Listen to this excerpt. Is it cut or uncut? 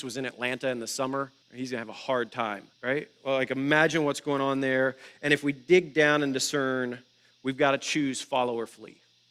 cut